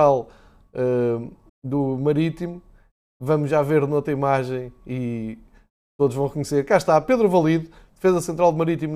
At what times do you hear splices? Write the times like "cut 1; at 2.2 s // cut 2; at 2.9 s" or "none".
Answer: cut 1; at 1.5 s